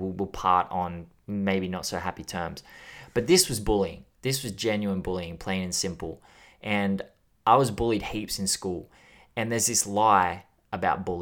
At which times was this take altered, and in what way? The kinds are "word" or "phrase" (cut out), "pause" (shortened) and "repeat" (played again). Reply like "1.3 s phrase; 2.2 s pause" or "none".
none